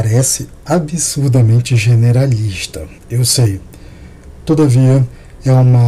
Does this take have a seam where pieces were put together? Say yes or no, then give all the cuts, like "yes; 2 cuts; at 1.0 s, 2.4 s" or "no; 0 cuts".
yes; 1 cut; at 3.0 s